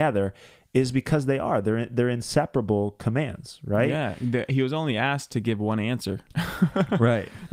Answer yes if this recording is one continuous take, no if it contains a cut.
yes